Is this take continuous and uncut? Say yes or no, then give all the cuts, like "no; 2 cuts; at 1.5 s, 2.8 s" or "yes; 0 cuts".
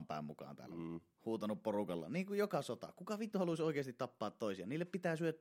yes; 0 cuts